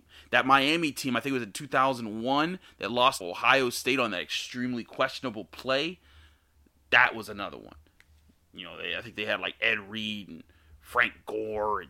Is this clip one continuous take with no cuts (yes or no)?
no